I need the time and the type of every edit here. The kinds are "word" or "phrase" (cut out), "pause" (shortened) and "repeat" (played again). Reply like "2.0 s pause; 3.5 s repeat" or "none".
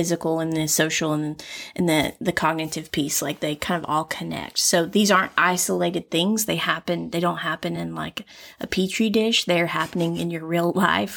none